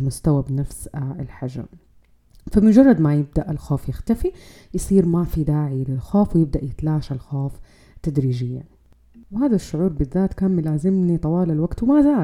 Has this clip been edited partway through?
no; 0 cuts

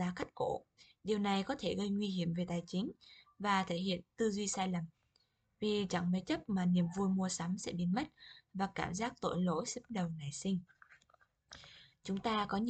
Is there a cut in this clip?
no; 0 cuts

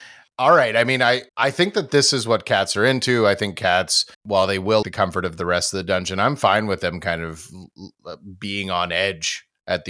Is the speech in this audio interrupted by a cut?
yes; 3 cuts; at 1.3 s, 4.1 s, 4.8 s

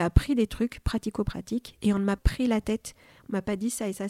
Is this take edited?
yes; 1 cut; at 2.2 s

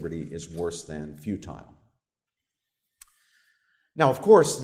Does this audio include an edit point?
no; 0 cuts

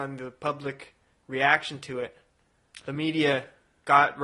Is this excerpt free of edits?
no; 1 cut; at 1.1 s

